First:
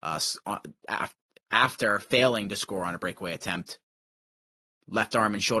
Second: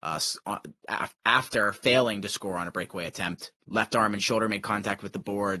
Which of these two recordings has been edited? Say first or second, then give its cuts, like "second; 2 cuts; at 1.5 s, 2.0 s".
second; 2 cuts; at 1.1 s, 3.6 s